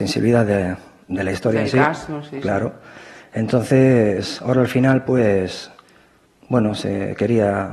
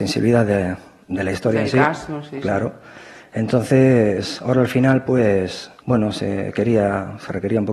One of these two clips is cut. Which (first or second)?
second